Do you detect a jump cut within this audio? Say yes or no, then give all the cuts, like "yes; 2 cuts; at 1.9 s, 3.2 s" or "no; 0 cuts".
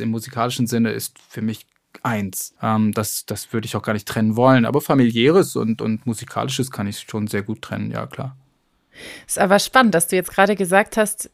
yes; 1 cut; at 2.6 s